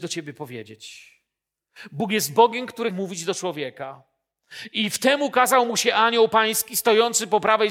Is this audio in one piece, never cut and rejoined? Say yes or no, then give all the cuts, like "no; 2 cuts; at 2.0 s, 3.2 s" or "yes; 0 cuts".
no; 1 cut; at 2.9 s